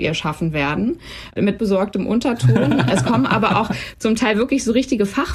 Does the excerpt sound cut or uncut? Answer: cut